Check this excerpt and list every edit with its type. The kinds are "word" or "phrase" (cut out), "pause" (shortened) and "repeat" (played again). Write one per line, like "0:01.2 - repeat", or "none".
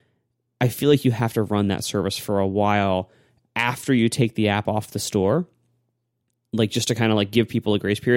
none